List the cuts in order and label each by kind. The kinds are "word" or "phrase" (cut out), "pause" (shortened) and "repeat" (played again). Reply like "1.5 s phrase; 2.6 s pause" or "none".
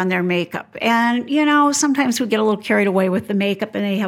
none